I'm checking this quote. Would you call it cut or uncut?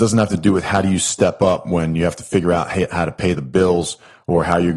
uncut